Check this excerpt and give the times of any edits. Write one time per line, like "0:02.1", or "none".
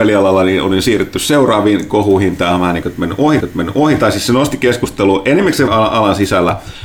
0:03.4
0:05.7